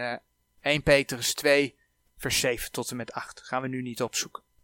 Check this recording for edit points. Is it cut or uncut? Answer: uncut